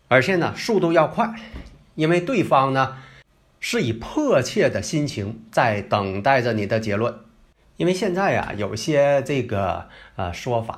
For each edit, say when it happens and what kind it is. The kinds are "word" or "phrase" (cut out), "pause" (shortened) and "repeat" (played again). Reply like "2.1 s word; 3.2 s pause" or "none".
none